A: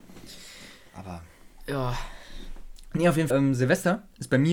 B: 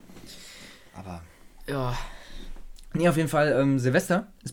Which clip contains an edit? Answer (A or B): A